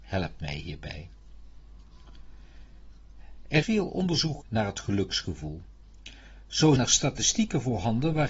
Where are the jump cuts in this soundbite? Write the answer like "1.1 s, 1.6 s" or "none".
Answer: 3.6 s, 4.4 s, 6.8 s